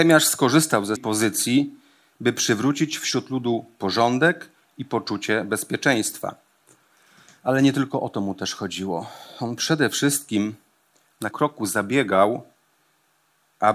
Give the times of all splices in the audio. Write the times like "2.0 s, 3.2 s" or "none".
1.0 s, 11.3 s